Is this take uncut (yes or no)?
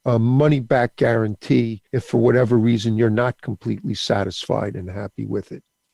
no